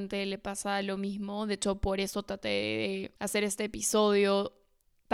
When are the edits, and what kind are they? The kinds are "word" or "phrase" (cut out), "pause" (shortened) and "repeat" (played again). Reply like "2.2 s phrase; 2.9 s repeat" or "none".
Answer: 3.2 s pause